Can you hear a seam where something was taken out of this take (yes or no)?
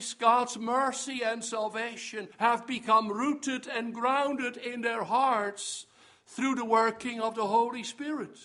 yes